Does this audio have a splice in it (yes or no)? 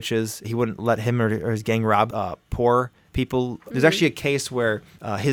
no